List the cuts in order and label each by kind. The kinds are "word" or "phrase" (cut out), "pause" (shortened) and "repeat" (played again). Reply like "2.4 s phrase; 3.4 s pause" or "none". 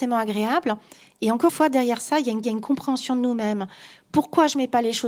1.5 s word; 2.4 s repeat